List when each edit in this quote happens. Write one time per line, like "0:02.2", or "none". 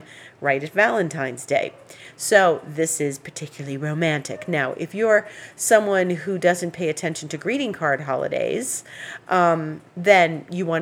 none